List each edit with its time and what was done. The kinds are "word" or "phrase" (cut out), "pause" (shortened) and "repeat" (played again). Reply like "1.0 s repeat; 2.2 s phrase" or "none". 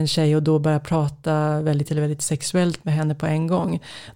1.9 s word